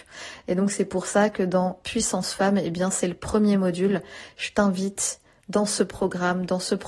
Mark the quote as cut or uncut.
uncut